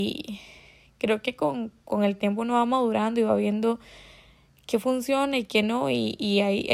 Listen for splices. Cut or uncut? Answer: uncut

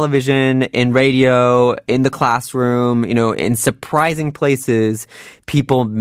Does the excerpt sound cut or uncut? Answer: uncut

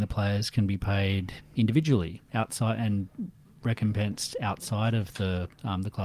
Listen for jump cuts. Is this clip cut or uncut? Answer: uncut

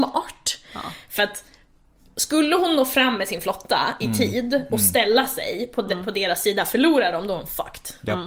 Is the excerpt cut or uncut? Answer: uncut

